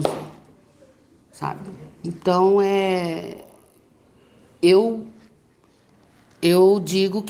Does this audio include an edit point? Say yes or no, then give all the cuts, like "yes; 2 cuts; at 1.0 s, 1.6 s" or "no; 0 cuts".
no; 0 cuts